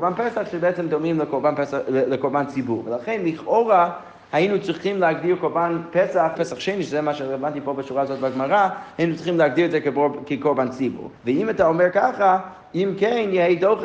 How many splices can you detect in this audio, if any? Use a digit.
2